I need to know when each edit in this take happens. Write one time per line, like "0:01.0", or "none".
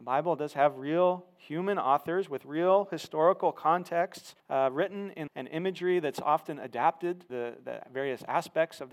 0:04.4
0:05.3
0:07.3